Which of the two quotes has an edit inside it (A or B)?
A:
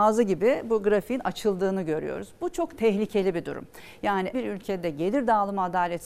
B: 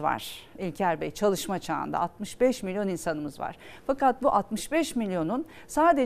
A